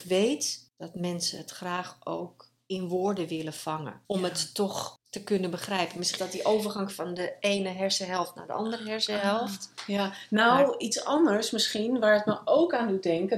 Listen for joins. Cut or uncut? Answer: cut